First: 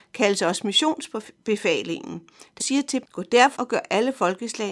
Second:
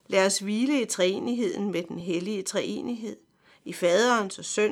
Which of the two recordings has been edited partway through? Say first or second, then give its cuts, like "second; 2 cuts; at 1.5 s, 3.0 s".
first; 3 cuts; at 2.6 s, 3.0 s, 3.6 s